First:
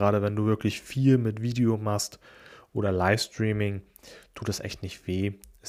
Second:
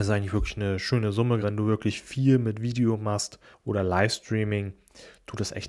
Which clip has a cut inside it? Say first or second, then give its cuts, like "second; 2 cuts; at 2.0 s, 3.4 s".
second; 2 cuts; at 1.4 s, 3.5 s